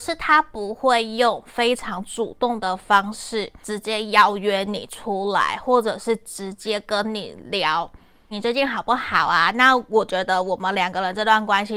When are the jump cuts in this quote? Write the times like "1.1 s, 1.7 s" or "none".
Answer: 3.6 s, 8.3 s